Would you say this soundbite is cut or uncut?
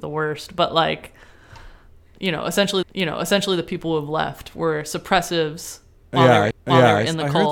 cut